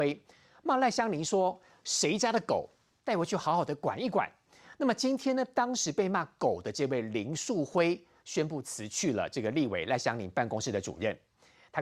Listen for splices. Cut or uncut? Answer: uncut